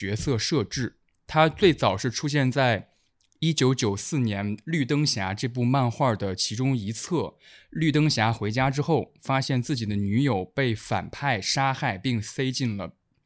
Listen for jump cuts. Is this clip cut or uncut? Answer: uncut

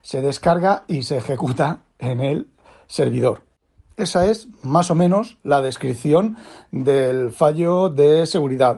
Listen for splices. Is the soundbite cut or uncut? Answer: uncut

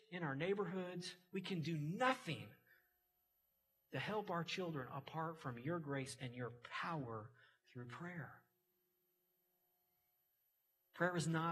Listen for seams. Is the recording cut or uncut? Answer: uncut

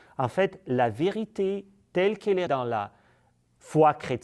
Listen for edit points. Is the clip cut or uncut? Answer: cut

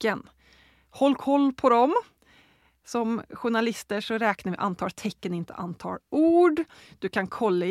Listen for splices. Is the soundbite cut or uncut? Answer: uncut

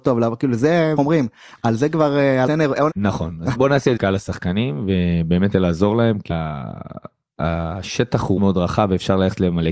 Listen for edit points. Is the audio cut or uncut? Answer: cut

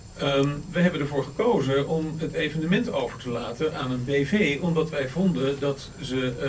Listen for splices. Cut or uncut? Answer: uncut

